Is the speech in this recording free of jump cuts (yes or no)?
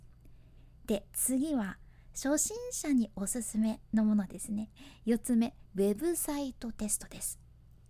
no